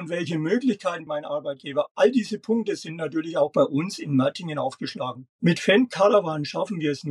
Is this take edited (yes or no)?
yes